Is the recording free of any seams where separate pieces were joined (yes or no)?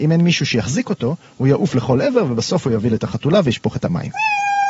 yes